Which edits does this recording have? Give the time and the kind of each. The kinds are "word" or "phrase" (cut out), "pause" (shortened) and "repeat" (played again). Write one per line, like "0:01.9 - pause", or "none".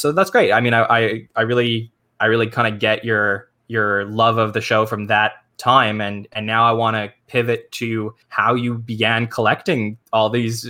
0:08.2 - pause